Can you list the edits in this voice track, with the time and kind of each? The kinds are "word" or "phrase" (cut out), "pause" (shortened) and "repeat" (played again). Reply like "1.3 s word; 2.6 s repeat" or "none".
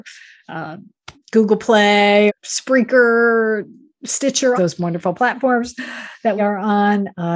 1.1 s pause; 2.3 s word; 4.6 s phrase; 5.2 s word; 6.4 s word